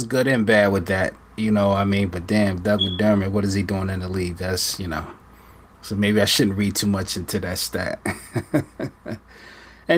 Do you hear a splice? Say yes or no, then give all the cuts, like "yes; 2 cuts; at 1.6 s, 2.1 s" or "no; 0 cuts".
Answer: no; 0 cuts